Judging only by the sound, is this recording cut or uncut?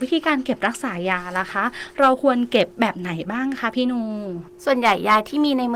cut